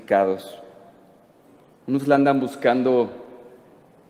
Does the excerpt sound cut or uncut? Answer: uncut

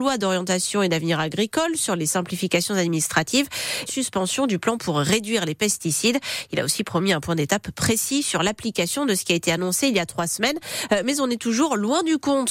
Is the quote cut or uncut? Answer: cut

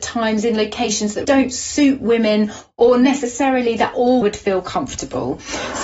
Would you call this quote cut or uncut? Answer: cut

